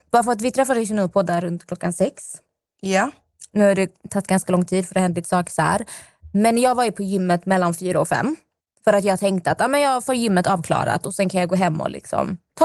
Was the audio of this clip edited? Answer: no; 0 cuts

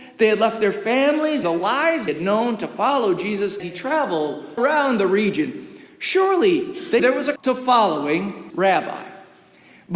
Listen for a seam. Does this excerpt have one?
yes; 7 cuts; at 1.4 s, 2.1 s, 3.6 s, 4.6 s, 7.0 s, 7.4 s, 8.5 s

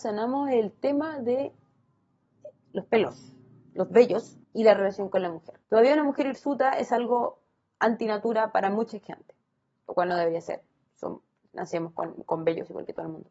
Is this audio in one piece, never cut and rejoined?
no; 2 cuts; at 4.4 s, 5.6 s

